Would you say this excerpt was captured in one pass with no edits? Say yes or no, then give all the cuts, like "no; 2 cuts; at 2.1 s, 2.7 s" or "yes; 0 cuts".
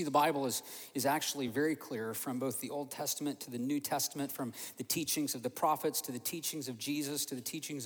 yes; 0 cuts